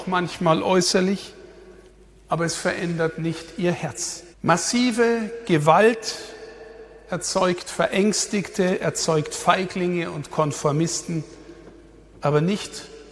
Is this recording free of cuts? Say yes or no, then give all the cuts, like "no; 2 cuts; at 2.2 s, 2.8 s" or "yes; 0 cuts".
no; 2 cuts; at 1.9 s, 4.3 s